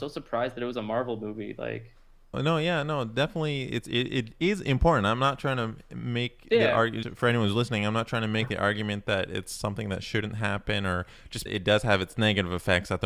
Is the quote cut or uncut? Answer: cut